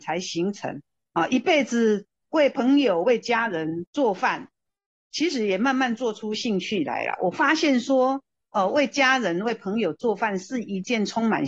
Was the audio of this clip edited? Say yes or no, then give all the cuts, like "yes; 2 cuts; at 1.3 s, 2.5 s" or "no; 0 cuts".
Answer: no; 0 cuts